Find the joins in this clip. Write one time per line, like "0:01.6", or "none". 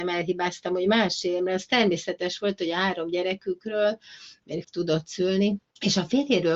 0:04.6